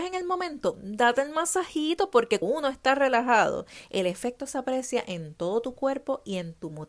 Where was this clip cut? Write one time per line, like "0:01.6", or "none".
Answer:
0:02.4